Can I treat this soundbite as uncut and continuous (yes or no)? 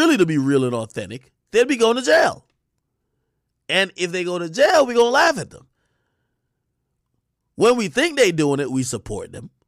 yes